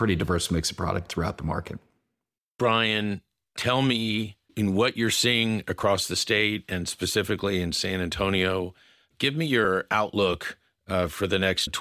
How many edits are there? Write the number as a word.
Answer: zero